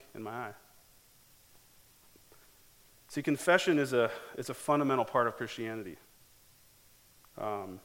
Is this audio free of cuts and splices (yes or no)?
yes